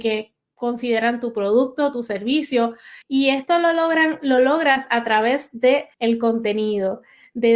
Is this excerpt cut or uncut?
cut